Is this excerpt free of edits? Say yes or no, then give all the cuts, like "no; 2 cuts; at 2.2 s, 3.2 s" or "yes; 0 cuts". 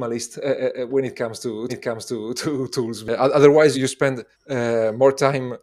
no; 3 cuts; at 1.7 s, 3.7 s, 4.3 s